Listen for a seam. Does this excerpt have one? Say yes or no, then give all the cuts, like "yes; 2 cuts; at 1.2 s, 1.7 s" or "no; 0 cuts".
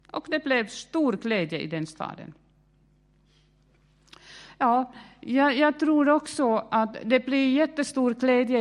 no; 0 cuts